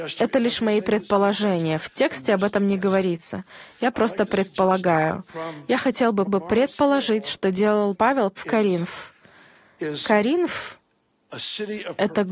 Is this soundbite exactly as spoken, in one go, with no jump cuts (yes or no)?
no